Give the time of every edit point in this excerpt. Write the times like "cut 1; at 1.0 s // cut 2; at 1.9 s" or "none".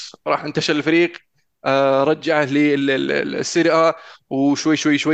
none